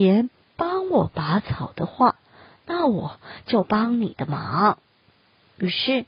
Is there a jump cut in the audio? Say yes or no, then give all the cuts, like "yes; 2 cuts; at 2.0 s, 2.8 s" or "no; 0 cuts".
no; 0 cuts